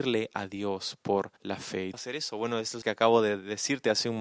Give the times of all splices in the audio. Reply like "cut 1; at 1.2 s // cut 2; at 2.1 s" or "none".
cut 1; at 1.4 s // cut 2; at 1.9 s // cut 3; at 2.8 s